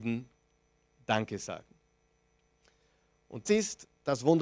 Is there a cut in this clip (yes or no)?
yes